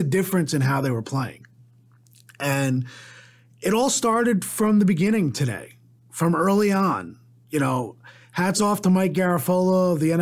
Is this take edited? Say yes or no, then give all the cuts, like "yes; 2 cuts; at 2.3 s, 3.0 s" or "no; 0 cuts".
no; 0 cuts